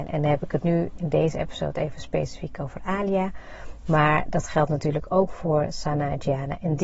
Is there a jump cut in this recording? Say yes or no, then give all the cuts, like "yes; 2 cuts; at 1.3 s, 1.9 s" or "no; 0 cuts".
no; 0 cuts